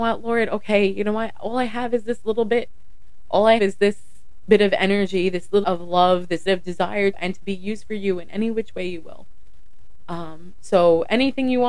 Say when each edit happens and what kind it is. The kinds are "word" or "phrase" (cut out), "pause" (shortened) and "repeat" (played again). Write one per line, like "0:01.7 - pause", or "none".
0:03.6 - word
0:04.4 - word
0:05.6 - word
0:06.5 - phrase
0:07.1 - phrase